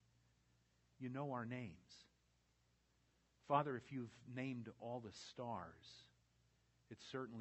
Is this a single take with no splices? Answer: yes; 0 cuts

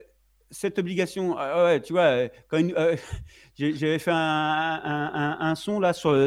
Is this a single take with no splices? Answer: yes; 0 cuts

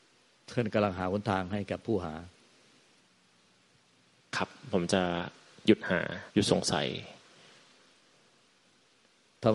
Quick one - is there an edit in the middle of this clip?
yes; 1 cut; at 6.3 s

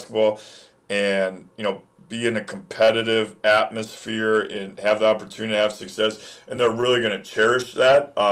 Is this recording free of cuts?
yes; 0 cuts

